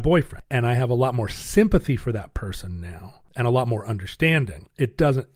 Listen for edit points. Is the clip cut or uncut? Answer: uncut